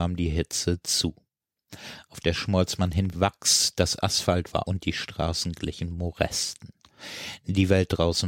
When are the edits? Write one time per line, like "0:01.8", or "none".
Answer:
0:02.3
0:03.1
0:04.6